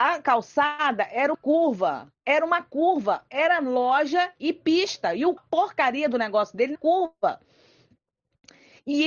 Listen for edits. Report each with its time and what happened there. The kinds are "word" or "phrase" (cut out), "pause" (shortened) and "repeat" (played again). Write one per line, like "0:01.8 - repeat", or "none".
0:01.3 - word
0:05.4 - phrase
0:06.8 - word